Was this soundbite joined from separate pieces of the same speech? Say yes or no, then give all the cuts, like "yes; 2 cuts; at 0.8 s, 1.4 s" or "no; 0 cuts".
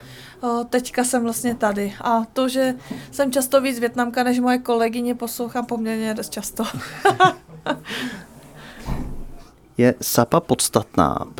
no; 0 cuts